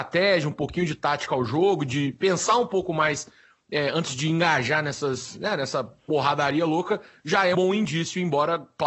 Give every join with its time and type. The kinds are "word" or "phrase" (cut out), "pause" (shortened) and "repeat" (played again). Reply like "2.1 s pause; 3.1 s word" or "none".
7.5 s word